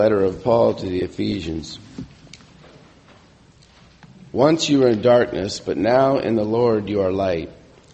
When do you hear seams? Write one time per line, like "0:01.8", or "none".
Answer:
none